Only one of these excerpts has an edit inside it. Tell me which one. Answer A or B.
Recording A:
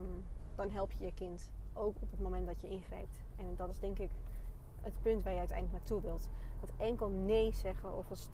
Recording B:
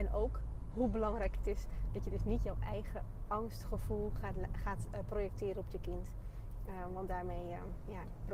A